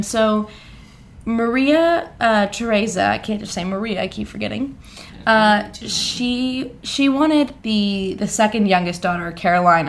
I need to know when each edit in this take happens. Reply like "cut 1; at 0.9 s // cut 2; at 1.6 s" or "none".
cut 1; at 7.6 s